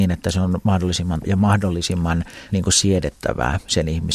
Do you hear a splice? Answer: yes; 2 cuts; at 1.2 s, 2.5 s

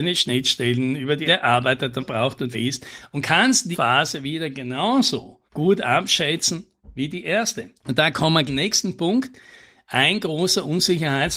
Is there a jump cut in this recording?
yes; 7 cuts; at 1.2 s, 2.0 s, 2.5 s, 3.7 s, 5.5 s, 7.8 s, 8.5 s

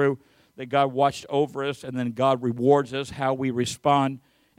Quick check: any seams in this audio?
no; 0 cuts

